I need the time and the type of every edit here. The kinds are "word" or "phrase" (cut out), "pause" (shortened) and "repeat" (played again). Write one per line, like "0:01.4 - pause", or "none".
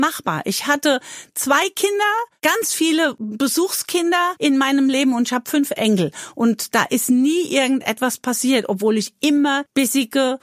none

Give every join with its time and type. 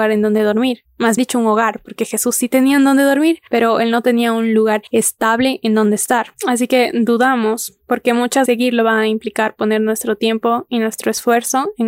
0:01.2 - word
0:08.5 - word

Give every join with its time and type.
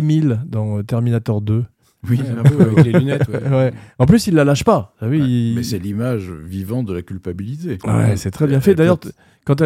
none

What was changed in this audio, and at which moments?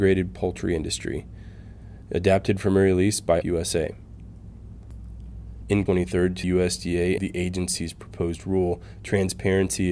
0:03.4 - word
0:05.9 - phrase
0:06.4 - word
0:07.2 - phrase

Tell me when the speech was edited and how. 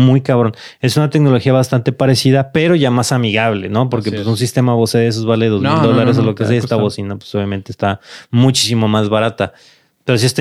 none

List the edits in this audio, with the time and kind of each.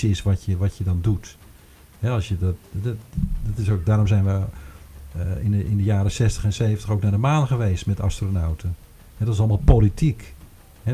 none

